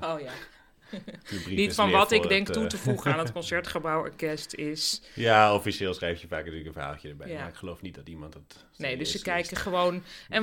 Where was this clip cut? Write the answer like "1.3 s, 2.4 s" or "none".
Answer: none